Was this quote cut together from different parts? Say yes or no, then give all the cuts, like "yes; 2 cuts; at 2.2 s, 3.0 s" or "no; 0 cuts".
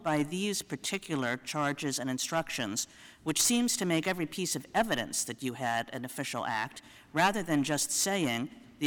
no; 0 cuts